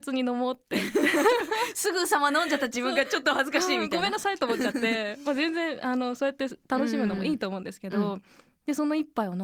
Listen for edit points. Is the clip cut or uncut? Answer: uncut